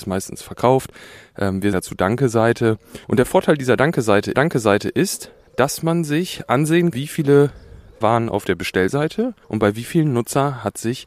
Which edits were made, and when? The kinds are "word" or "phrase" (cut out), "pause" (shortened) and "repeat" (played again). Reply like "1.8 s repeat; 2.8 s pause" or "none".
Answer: 1.7 s word; 3.0 s pause; 4.3 s repeat; 6.9 s word; 8.0 s word; 9.4 s pause